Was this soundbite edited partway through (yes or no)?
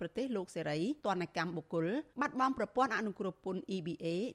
yes